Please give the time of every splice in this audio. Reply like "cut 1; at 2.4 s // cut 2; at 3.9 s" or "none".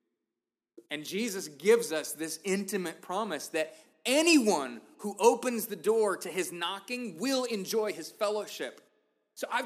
none